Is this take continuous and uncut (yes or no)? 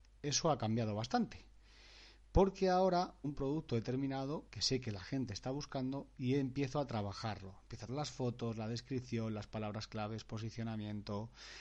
no